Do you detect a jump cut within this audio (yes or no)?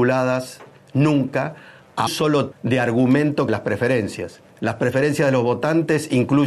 yes